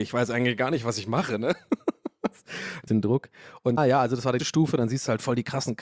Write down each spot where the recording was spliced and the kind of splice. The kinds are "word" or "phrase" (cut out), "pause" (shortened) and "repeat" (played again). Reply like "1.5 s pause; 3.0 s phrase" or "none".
2.9 s phrase; 3.8 s word; 4.4 s word